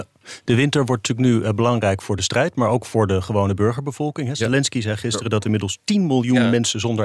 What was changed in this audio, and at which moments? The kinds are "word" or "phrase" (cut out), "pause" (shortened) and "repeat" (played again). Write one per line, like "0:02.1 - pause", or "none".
none